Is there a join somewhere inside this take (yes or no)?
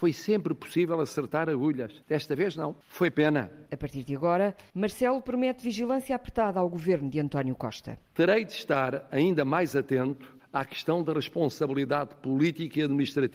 yes